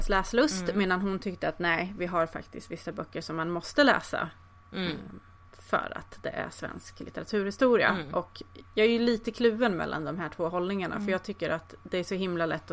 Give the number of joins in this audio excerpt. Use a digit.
0